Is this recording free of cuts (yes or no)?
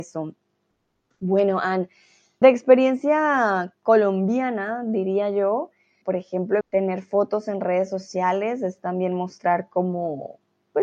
no